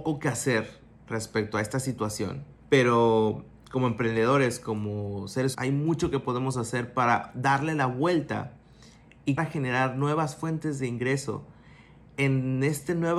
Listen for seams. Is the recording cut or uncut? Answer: cut